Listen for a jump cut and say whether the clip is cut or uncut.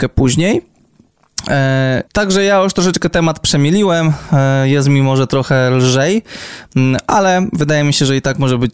cut